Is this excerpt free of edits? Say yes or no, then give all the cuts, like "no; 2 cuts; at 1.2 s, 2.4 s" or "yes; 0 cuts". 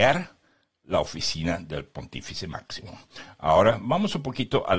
yes; 0 cuts